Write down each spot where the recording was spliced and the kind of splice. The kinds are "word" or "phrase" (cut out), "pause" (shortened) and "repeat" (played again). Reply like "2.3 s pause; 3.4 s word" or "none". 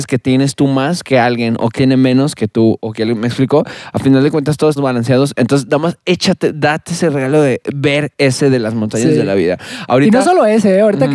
1.8 s word; 4.8 s word